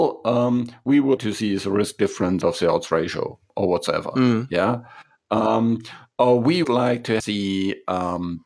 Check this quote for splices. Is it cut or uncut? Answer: cut